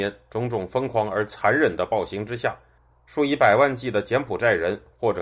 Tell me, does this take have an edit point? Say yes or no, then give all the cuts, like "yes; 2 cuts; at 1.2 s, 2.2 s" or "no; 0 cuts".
no; 0 cuts